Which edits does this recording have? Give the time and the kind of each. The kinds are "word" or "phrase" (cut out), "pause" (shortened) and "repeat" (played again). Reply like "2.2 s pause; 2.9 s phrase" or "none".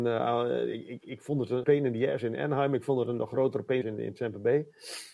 1.0 s word; 1.6 s word; 3.8 s word